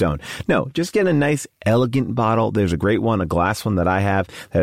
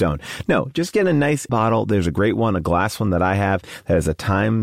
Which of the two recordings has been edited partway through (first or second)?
second